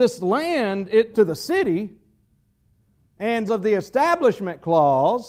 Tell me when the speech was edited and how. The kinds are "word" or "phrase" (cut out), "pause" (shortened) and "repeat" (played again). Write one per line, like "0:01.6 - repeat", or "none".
0:01.1 - word
0:03.5 - word